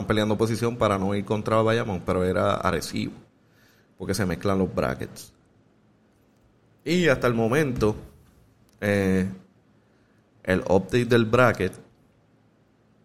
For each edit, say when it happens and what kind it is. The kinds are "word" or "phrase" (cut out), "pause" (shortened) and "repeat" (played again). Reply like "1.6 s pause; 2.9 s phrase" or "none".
none